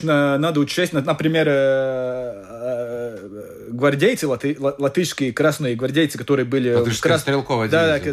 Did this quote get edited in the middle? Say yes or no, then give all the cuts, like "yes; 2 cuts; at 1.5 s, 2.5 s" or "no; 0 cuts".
no; 0 cuts